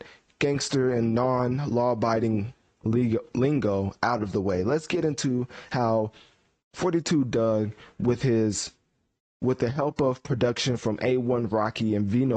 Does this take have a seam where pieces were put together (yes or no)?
no